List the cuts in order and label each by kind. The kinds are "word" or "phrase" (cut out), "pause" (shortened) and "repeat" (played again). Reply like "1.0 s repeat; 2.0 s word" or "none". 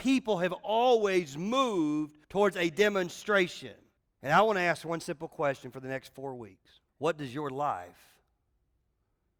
2.2 s pause; 4.0 s pause; 6.9 s pause

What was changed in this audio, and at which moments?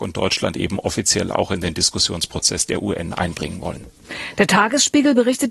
none

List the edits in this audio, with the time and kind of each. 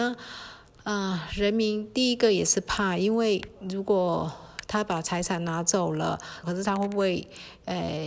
6.4 s phrase

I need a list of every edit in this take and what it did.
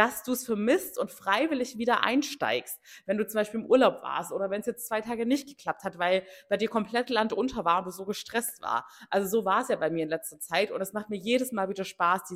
none

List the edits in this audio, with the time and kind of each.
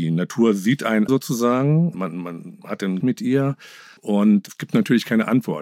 1.1 s word; 1.9 s phrase; 3.0 s phrase; 4.0 s pause

